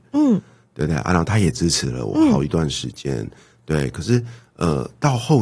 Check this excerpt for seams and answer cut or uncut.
uncut